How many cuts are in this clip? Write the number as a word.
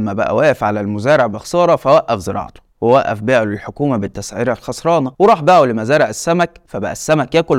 two